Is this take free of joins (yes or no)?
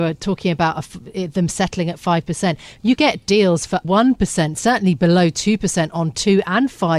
no